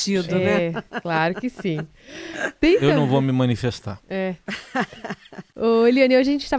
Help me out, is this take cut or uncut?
cut